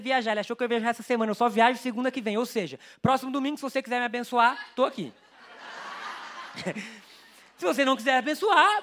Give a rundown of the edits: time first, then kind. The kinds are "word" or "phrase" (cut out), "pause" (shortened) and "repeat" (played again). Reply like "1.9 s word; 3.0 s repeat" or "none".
none